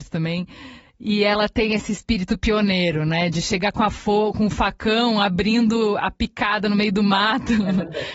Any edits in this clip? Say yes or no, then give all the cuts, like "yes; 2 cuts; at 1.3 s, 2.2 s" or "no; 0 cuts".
no; 0 cuts